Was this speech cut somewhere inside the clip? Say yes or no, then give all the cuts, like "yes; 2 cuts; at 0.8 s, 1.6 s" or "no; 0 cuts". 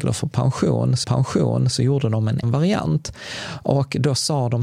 yes; 2 cuts; at 1.0 s, 2.4 s